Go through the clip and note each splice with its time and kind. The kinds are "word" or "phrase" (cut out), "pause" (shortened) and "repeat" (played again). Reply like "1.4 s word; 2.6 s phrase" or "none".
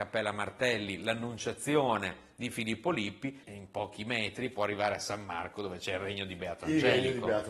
3.4 s phrase

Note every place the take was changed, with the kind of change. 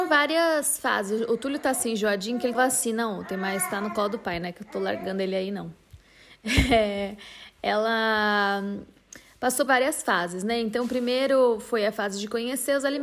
2.5 s word; 9.7 s word

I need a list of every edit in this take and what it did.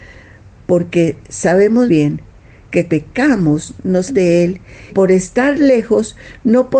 1.9 s word; 2.9 s word; 4.1 s word; 4.9 s word

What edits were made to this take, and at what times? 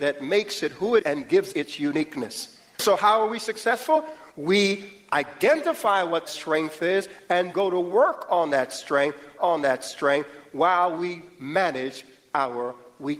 1.0 s word; 1.5 s word; 6.2 s word; 7.5 s word; 9.4 s repeat

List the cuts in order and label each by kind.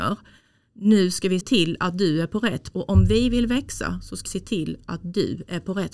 1.4 s word; 2.7 s word; 4.3 s word

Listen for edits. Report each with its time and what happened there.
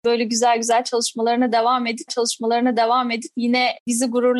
2.1 s repeat

